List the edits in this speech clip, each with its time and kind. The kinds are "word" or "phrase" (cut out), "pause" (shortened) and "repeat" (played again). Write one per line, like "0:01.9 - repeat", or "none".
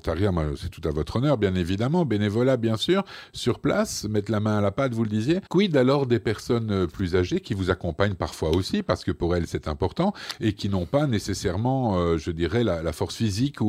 0:05.5 - pause